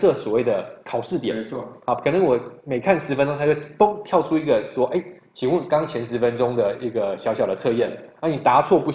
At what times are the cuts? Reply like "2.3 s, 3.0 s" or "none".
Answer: none